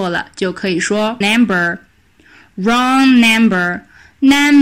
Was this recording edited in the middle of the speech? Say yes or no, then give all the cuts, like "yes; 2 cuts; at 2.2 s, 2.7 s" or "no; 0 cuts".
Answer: yes; 1 cut; at 1.2 s